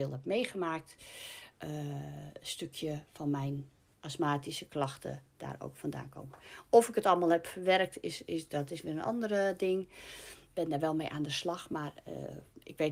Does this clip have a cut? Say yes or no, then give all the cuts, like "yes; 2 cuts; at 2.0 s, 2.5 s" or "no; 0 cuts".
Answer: no; 0 cuts